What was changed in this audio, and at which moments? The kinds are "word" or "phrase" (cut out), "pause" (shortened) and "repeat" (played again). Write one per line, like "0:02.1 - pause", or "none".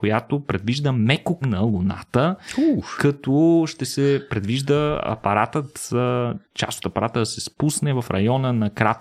0:01.4 - word
0:06.4 - pause